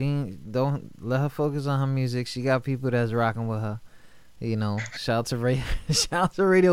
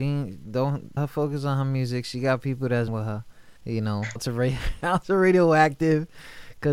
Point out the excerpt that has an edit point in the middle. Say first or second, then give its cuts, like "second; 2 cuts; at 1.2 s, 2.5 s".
second; 5 cuts; at 1.0 s, 2.9 s, 3.6 s, 4.2 s, 4.8 s